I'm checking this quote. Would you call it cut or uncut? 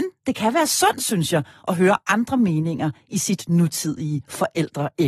uncut